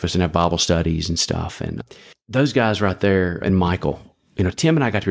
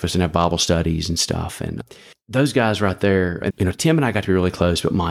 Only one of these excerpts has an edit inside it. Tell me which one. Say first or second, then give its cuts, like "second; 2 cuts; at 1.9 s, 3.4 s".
second; 1 cut; at 3.5 s